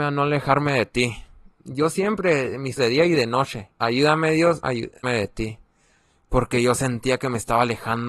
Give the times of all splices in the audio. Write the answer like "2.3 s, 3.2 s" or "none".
2.8 s, 3.7 s, 4.6 s, 5.0 s